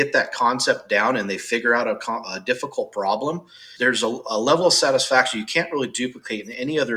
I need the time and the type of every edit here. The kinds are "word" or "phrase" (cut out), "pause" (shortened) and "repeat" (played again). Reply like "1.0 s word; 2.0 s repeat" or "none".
3.8 s word